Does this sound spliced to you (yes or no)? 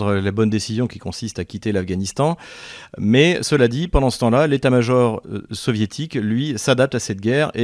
no